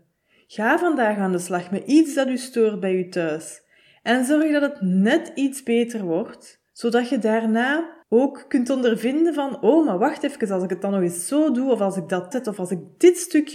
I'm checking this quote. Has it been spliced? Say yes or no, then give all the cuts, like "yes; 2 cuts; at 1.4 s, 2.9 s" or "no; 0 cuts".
yes; 3 cuts; at 6.7 s, 8.0 s, 12.3 s